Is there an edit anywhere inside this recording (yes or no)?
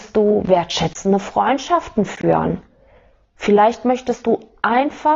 no